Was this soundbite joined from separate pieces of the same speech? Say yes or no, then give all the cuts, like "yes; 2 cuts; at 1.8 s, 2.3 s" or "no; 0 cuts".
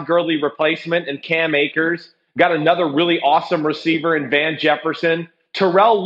no; 0 cuts